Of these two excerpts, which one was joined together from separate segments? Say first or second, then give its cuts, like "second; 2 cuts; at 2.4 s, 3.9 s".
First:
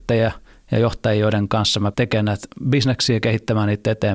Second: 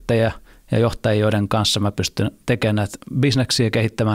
first; 1 cut; at 1.9 s